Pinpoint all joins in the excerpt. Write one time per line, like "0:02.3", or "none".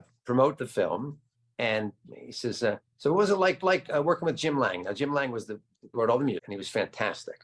0:01.3
0:02.1
0:02.9
0:03.6
0:05.9
0:06.4

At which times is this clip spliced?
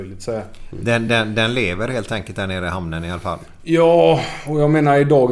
none

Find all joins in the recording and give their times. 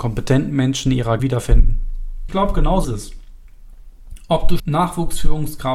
0:01.2
0:02.3
0:02.8
0:04.6

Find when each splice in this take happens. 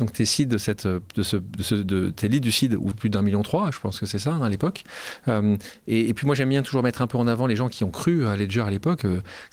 0:02.9

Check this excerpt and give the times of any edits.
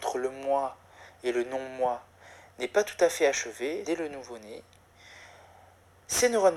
0:03.8

